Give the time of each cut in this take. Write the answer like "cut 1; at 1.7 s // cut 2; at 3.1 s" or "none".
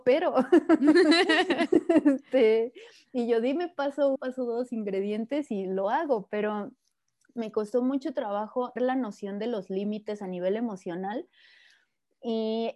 cut 1; at 4.2 s // cut 2; at 8.8 s